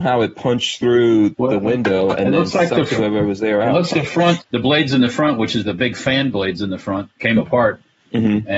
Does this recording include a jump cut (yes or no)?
yes